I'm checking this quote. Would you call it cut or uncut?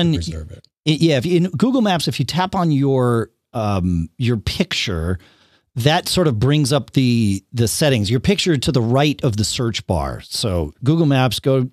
uncut